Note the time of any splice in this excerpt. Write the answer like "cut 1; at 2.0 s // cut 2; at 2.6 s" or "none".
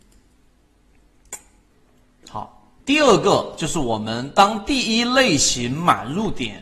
cut 1; at 2.8 s

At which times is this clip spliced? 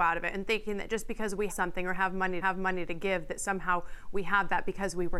cut 1; at 1.5 s // cut 2; at 2.4 s

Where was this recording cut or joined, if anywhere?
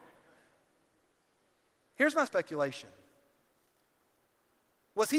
cut 1; at 2.3 s

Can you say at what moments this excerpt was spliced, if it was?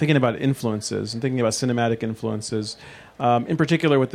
none

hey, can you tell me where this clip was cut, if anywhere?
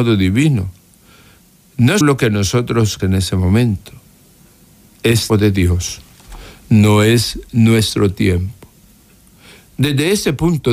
cut 1; at 2.0 s // cut 2; at 3.0 s // cut 3; at 5.3 s

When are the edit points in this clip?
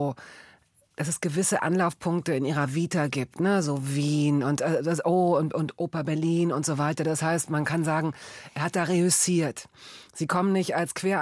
none

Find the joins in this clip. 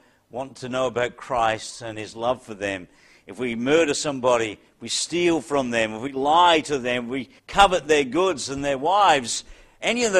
cut 1; at 7.4 s

